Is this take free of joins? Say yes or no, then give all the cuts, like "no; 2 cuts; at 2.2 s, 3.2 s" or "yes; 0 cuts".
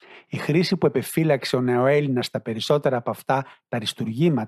yes; 0 cuts